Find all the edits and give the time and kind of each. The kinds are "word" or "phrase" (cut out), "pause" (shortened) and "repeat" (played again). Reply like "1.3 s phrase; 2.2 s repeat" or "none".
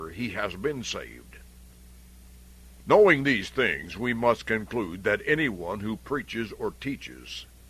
none